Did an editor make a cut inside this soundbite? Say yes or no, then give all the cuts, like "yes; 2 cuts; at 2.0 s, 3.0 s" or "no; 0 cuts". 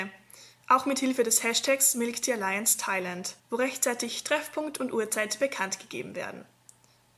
yes; 1 cut; at 3.4 s